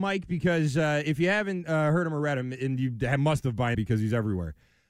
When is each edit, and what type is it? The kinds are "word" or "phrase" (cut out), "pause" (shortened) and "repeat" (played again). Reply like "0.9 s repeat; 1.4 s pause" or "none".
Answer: 3.7 s word